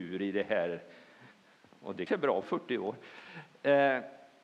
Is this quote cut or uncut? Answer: cut